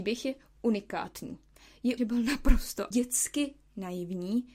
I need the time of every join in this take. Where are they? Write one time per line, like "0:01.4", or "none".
0:02.0
0:02.9

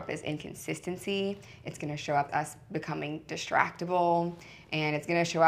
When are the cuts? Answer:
0:02.3

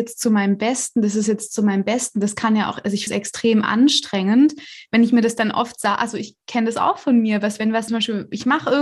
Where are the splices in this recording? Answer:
0:03.1
0:07.9

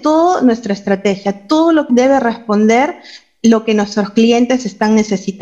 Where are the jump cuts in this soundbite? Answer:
0:01.9

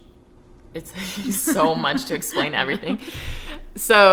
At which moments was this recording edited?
none

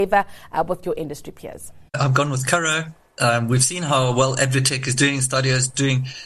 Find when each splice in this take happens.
0:01.9

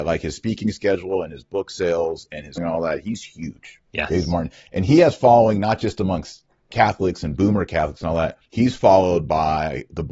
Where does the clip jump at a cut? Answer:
0:02.6
0:03.9
0:08.5

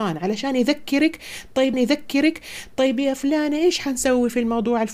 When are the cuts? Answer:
0:01.7

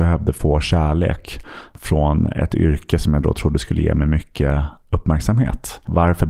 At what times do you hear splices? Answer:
none

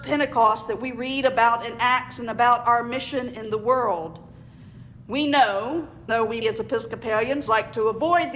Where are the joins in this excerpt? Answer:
0:06.1
0:06.4

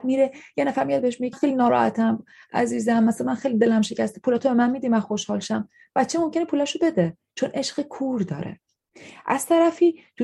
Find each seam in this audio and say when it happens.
0:01.3

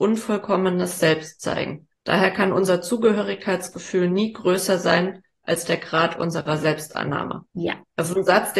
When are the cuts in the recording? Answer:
0:02.0
0:07.5

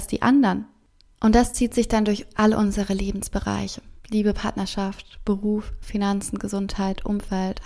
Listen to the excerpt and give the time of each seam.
0:04.0

